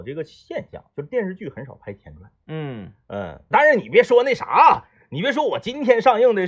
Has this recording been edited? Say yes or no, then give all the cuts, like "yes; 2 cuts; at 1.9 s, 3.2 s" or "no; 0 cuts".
yes; 1 cut; at 3.5 s